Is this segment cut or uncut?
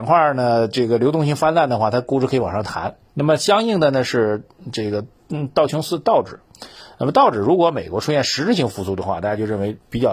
cut